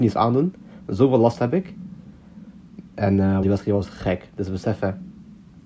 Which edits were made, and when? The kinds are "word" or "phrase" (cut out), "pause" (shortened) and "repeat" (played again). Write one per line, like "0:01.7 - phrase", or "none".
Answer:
0:02.9 - pause
0:03.4 - word